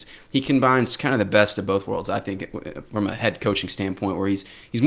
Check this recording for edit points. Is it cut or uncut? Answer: uncut